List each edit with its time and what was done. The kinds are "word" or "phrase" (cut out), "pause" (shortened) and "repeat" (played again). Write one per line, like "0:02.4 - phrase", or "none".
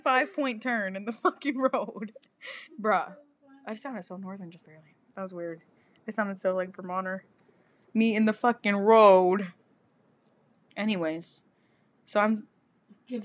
none